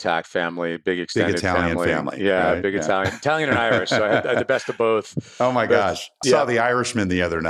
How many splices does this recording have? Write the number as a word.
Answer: one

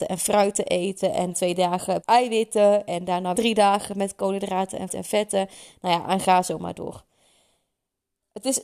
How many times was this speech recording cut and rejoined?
four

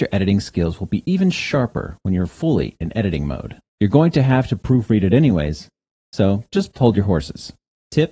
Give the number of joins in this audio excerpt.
one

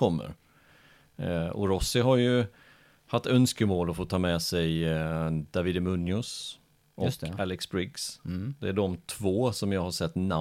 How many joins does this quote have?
zero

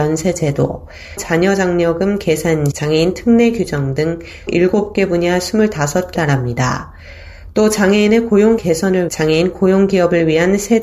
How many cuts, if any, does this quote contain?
six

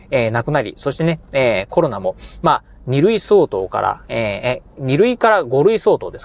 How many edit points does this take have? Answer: one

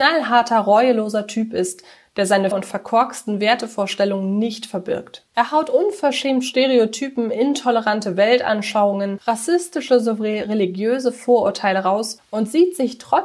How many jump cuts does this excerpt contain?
two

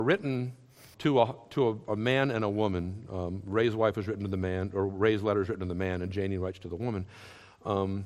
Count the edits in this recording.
one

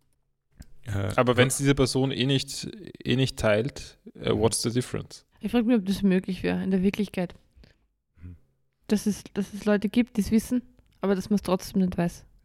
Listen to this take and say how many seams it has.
one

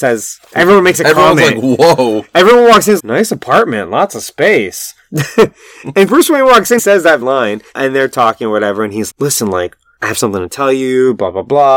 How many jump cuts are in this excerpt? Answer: five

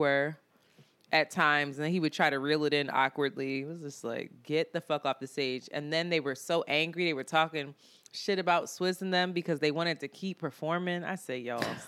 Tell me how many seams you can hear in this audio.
zero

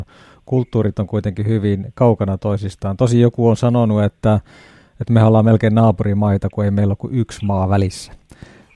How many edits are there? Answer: zero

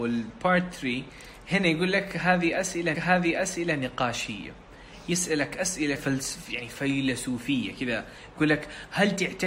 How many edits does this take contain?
two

